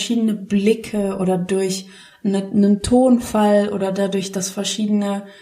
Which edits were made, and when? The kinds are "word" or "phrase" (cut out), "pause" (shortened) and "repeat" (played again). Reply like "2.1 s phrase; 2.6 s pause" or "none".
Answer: none